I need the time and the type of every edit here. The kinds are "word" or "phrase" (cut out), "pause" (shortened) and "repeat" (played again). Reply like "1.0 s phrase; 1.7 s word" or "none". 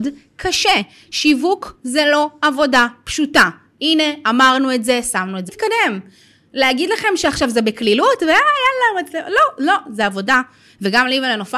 5.5 s phrase